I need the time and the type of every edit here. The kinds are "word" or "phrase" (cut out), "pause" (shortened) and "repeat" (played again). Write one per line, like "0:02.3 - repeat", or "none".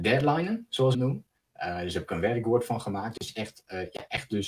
0:00.9 - phrase